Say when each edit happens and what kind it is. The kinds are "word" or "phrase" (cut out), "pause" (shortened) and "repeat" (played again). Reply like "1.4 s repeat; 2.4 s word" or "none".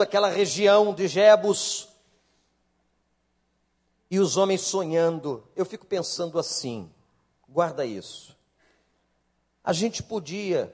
none